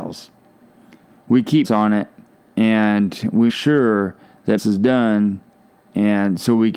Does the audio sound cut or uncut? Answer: cut